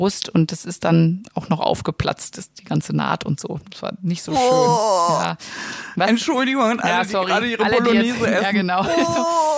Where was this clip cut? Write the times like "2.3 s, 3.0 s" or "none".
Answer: none